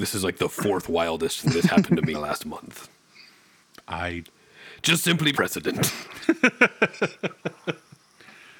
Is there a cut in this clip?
yes; 4 cuts; at 1.4 s, 2.1 s, 3.6 s, 5.3 s

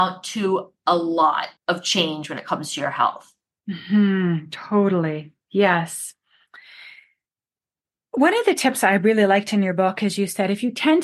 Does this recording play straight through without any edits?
no; 1 cut; at 1.6 s

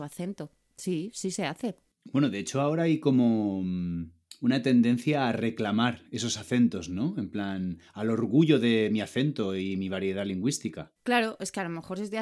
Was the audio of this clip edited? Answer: yes; 2 cuts; at 1.9 s, 11.0 s

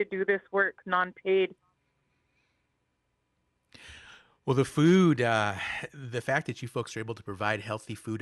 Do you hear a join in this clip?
no; 0 cuts

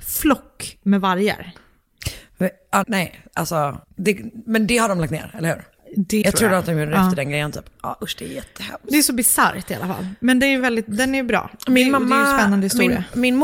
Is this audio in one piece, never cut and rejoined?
no; 3 cuts; at 2.8 s, 3.8 s, 6.2 s

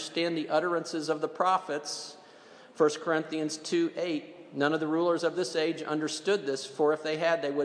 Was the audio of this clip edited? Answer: no; 0 cuts

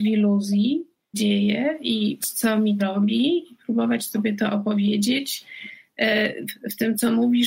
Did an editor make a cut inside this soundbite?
yes; 3 cuts; at 1.1 s, 2.2 s, 2.8 s

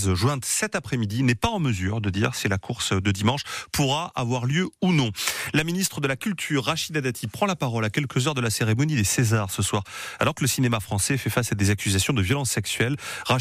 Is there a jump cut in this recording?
no; 0 cuts

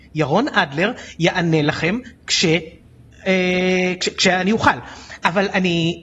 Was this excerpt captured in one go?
yes; 0 cuts

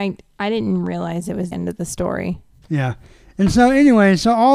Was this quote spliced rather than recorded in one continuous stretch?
yes; 1 cut; at 1.5 s

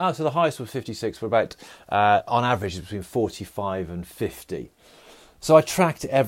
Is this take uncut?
yes; 0 cuts

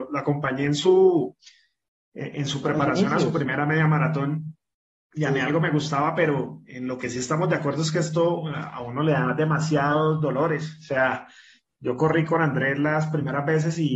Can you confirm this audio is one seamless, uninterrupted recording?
yes; 0 cuts

